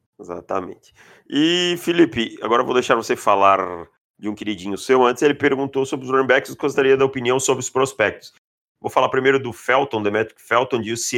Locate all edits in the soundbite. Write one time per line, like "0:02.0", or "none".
none